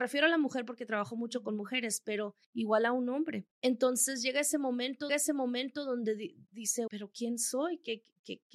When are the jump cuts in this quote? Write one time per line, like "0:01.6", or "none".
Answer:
0:02.4
0:03.5
0:05.1
0:06.9